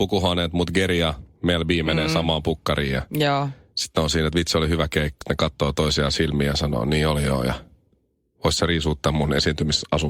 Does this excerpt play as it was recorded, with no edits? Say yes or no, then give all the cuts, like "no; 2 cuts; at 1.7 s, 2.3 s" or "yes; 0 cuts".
no; 1 cut; at 5.2 s